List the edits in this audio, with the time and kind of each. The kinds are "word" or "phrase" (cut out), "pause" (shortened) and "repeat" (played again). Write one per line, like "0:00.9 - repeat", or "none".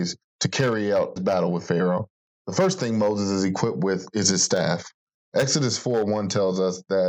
0:01.2 - word

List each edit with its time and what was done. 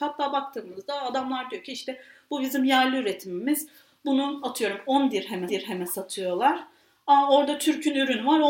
0:05.5 - repeat

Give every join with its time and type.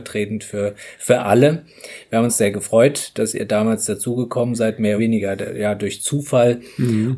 0:02.3 - word
0:05.0 - word

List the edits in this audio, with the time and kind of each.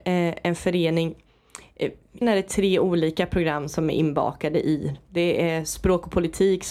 0:02.2 - word

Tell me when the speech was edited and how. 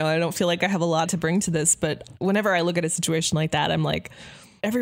0:01.1 - phrase

